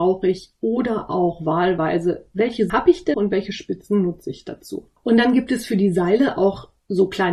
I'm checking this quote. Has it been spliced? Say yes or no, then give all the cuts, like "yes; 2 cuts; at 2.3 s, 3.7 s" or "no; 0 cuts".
yes; 3 cuts; at 2.7 s, 3.1 s, 5.0 s